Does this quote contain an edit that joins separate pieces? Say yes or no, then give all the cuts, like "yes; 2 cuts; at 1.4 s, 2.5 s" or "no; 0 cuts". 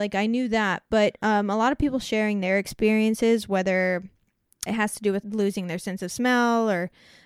yes; 2 cuts; at 4.7 s, 5.2 s